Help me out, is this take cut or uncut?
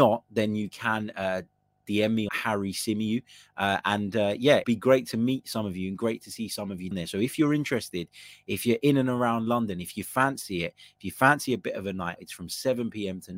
cut